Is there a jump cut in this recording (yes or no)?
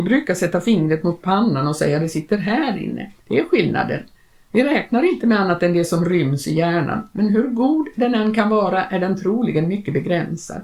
yes